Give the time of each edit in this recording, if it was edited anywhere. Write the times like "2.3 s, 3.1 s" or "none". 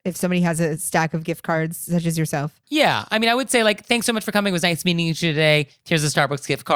none